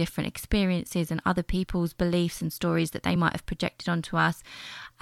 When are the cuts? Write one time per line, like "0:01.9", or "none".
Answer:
none